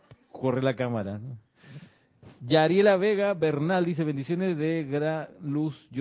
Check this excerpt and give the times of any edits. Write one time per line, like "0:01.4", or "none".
none